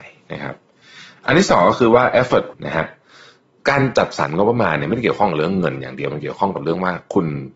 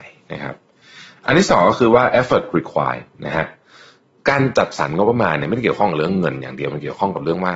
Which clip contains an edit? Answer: first; 1 cut; at 2.5 s

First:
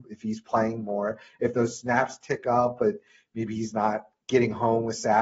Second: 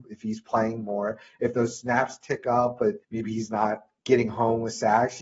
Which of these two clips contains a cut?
second; 1 cut; at 3.0 s

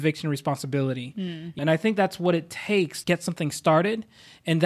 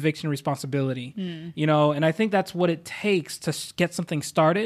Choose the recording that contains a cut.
first; 2 cuts; at 1.6 s, 3.0 s

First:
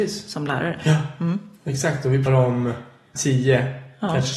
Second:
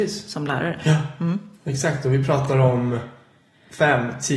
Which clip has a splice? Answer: first; 2 cuts; at 2.3 s, 3.2 s

